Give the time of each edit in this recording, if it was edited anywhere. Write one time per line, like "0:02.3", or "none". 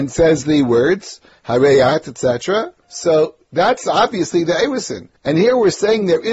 0:02.8
0:05.2